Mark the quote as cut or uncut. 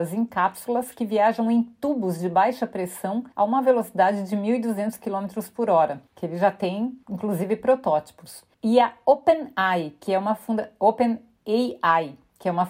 cut